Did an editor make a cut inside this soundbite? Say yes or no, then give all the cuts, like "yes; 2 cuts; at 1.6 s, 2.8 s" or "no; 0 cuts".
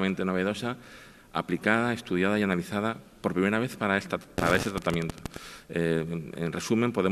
no; 0 cuts